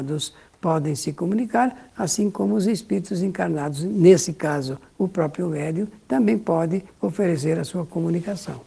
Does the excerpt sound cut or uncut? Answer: uncut